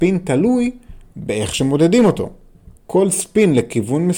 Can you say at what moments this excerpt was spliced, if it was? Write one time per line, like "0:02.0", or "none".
0:02.8

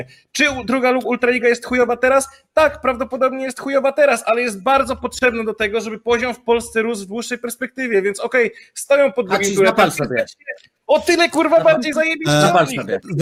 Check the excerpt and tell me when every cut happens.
none

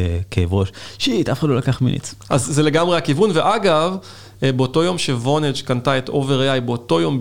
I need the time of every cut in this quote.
none

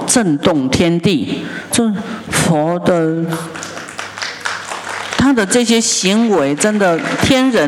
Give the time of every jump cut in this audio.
0:01.7

